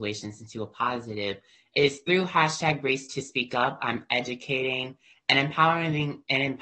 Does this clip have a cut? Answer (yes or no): no